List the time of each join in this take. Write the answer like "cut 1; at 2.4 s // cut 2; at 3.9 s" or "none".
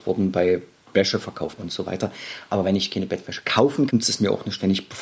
cut 1; at 1.6 s // cut 2; at 3.9 s